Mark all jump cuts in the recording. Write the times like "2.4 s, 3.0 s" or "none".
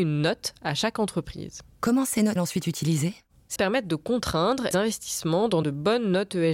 2.4 s, 3.6 s, 4.7 s, 5.6 s